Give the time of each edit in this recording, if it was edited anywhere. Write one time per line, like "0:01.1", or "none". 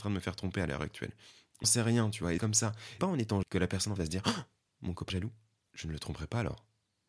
0:01.6
0:02.4
0:03.0
0:03.4
0:04.0
0:05.1